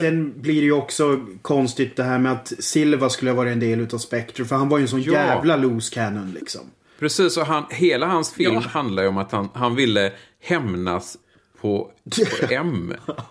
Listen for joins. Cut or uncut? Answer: uncut